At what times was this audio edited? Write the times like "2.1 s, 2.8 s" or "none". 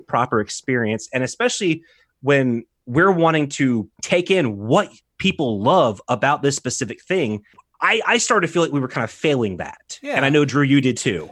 3.9 s

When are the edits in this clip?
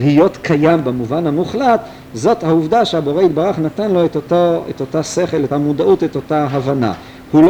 5.5 s

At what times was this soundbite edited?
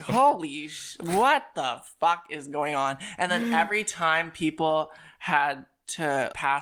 none

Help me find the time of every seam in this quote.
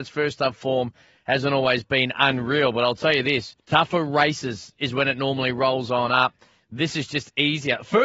3.6 s

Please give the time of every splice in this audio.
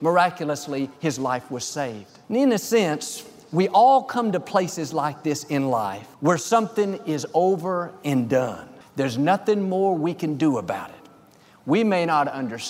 2.2 s, 6.1 s, 8.8 s

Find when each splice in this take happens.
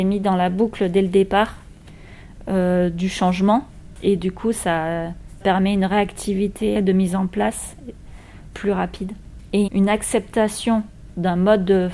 5.4 s, 6.7 s, 9.7 s

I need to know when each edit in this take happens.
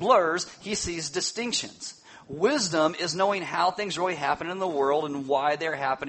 none

